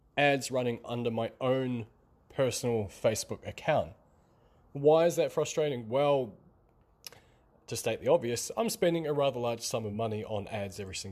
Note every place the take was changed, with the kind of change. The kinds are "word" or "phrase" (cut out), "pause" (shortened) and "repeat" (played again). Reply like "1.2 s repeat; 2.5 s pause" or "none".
none